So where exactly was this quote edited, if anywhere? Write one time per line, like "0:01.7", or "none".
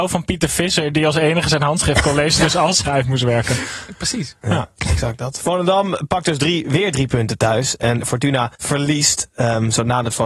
0:02.9
0:08.6